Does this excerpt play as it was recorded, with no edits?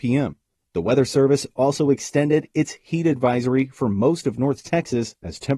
yes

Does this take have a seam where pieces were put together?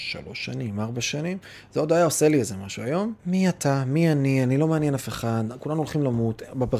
yes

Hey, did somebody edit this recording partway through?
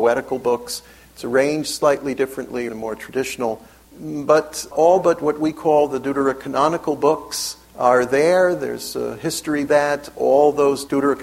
yes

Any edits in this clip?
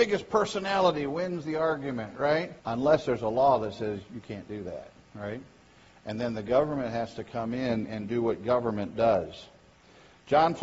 yes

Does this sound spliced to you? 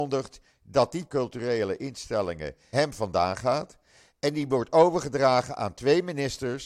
yes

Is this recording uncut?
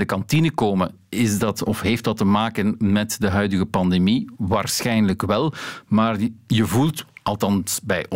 yes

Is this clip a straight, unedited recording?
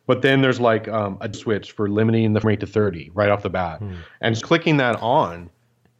no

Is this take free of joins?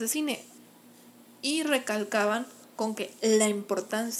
yes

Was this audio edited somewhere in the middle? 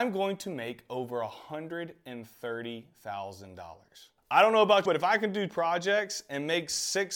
yes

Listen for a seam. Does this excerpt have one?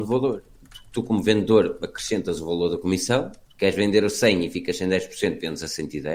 yes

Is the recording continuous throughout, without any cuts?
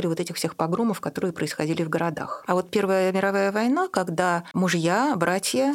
yes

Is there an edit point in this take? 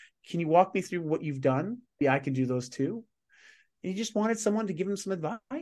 yes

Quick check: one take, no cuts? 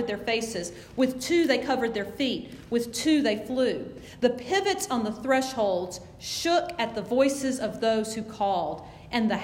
yes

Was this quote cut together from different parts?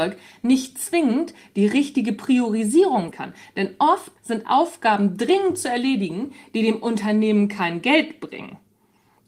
yes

